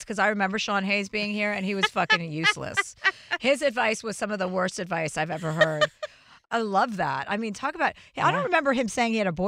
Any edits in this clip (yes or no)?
no